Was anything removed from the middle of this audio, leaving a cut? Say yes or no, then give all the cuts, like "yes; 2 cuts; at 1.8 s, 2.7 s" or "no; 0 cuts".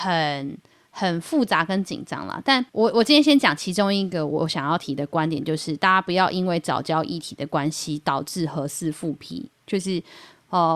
yes; 1 cut; at 2.7 s